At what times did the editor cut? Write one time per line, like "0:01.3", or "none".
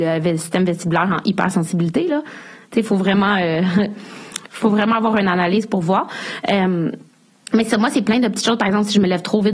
none